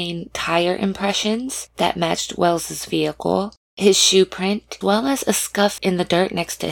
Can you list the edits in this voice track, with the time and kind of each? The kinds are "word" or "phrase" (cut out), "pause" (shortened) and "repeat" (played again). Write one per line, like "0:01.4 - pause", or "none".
0:03.6 - pause
0:04.8 - word
0:05.8 - word